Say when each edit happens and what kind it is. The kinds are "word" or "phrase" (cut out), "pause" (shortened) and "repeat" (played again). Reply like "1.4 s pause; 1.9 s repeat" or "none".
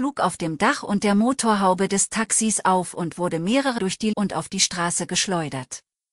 3.8 s word; 4.1 s word

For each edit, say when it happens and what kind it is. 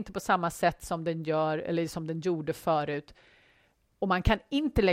none

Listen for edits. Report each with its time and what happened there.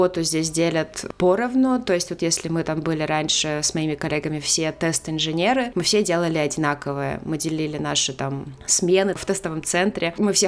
none

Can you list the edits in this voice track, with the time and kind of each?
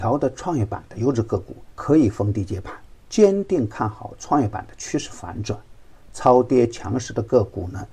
1.7 s pause; 3.0 s pause

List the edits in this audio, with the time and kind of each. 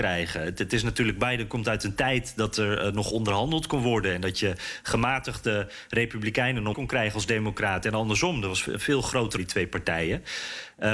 6.7 s word; 9.4 s phrase

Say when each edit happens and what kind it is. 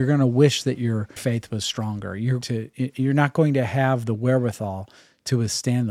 1.2 s word; 2.4 s word

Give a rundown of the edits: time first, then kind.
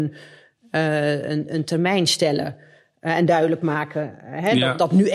none

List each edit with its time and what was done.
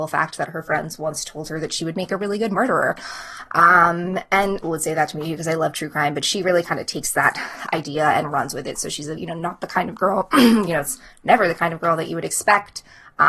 4.6 s phrase; 9.2 s word

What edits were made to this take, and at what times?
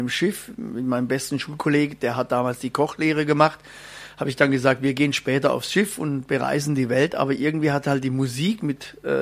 none

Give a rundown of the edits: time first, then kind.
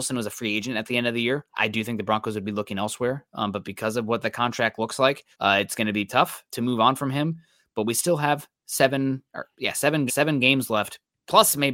1.5 s pause; 5.3 s pause; 6.1 s word; 6.5 s word; 10.1 s repeat

